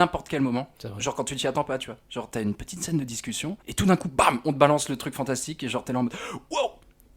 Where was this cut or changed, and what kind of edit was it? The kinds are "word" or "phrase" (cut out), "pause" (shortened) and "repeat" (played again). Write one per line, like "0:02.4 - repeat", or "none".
0:03.6 - pause